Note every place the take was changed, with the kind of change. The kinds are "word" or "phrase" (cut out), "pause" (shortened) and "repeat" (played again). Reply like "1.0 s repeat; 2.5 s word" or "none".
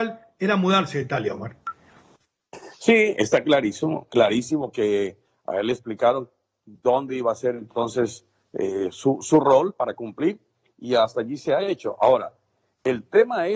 none